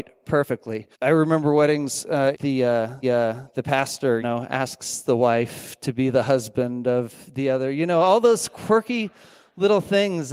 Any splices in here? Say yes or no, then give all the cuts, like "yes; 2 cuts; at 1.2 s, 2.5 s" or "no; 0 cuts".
yes; 4 cuts; at 0.9 s, 2.3 s, 3.0 s, 4.2 s